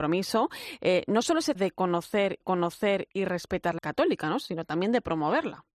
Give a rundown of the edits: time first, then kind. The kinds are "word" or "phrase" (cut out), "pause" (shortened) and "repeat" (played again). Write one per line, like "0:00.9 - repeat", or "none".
0:01.5 - word
0:02.4 - repeat
0:03.8 - word

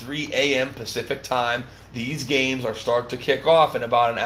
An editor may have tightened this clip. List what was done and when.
none

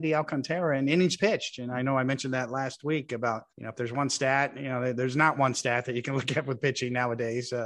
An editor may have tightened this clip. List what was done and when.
0:03.5 - pause

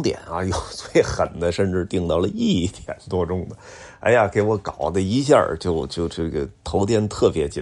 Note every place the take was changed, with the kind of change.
none

